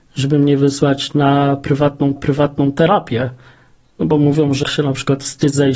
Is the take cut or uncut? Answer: cut